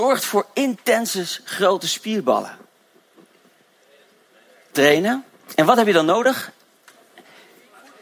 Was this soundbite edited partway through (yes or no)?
yes